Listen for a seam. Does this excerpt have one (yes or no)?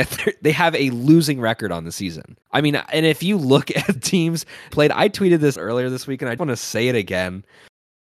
yes